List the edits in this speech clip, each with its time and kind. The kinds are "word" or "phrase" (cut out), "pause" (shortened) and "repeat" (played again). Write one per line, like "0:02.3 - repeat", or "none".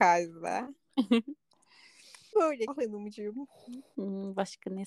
0:02.3 - word
0:02.7 - word